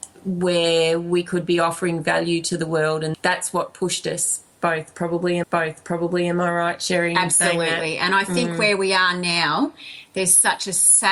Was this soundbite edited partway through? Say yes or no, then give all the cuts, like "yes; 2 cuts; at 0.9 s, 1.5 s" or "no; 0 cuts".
yes; 2 cuts; at 3.1 s, 5.4 s